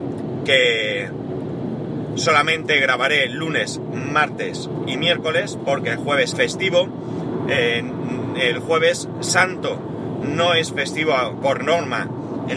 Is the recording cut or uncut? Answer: cut